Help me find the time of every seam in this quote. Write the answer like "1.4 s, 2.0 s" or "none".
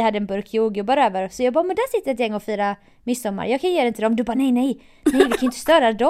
4.3 s